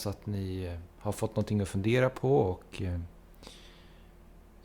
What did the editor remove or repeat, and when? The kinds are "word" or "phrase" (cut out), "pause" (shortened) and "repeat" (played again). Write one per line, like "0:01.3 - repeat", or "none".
none